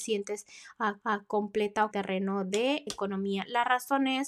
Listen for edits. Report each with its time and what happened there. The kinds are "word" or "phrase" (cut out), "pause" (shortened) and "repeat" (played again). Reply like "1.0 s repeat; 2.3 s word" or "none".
1.0 s repeat; 1.9 s phrase; 2.9 s word